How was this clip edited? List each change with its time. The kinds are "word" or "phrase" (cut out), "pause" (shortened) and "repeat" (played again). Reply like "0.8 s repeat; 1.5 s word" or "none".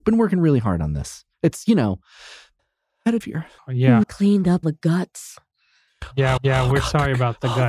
1.3 s pause; 2.6 s pause; 3.2 s word; 3.6 s word; 4.0 s word; 4.6 s word; 6.4 s repeat